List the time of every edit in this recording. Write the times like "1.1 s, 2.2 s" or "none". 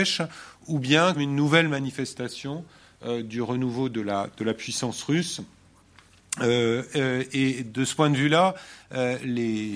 1.1 s